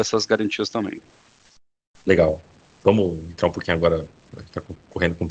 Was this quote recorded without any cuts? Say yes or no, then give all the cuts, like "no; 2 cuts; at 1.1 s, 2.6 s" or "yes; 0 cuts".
yes; 0 cuts